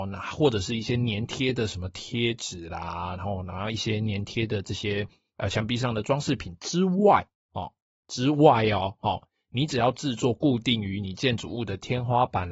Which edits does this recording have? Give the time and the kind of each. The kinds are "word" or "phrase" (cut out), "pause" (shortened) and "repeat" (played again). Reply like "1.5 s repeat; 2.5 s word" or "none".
none